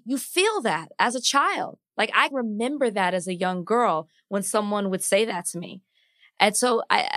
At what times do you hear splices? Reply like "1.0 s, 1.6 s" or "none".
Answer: 2.3 s

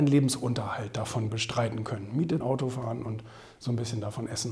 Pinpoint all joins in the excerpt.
1.3 s, 2.4 s

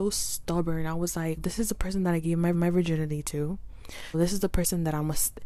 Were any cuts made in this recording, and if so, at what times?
1.4 s, 2.5 s, 4.1 s

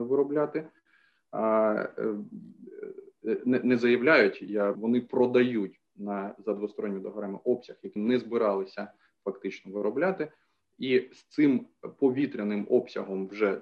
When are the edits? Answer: 4.7 s, 8.0 s

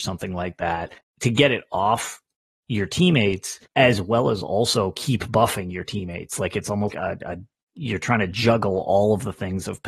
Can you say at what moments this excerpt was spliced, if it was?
1.0 s, 3.7 s, 6.9 s

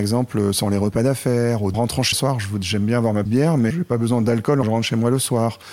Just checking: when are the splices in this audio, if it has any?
1.7 s, 2.1 s, 3.3 s, 3.7 s, 4.6 s

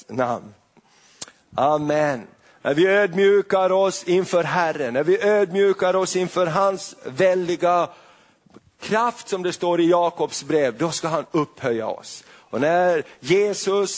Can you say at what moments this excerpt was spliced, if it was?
none

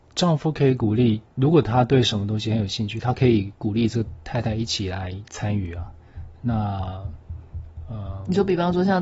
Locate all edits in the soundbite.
1.3 s

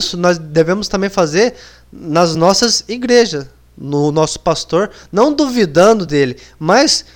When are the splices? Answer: none

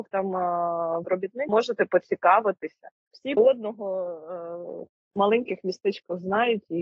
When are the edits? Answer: 1.0 s, 1.5 s, 3.4 s

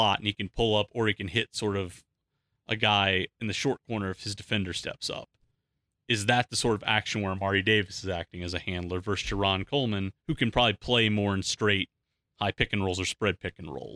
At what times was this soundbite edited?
3.3 s, 10.2 s

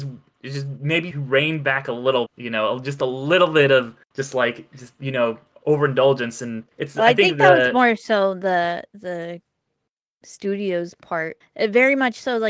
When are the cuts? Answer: 1.1 s, 2.3 s, 4.0 s, 6.7 s, 10.2 s, 11.4 s

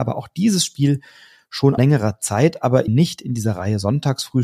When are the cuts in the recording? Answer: 1.8 s, 2.9 s

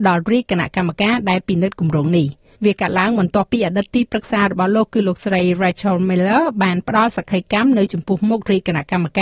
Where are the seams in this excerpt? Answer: 2.5 s

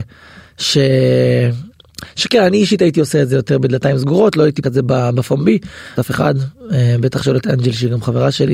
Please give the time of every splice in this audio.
4.6 s, 6.0 s

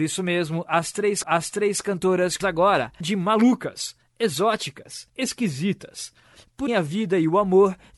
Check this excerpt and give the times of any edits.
1.2 s, 2.4 s, 3.0 s, 5.1 s, 6.7 s

